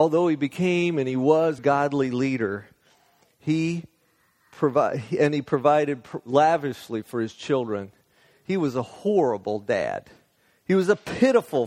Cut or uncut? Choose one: cut